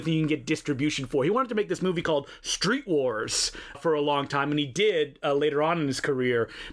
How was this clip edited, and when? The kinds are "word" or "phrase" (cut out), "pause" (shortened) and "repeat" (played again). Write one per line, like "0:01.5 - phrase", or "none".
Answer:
0:03.7 - word